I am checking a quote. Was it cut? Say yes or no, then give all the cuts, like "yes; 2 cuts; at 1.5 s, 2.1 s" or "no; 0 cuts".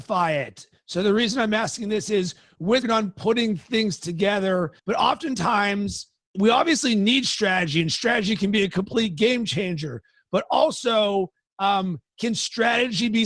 yes; 3 cuts; at 2.8 s, 4.8 s, 6.3 s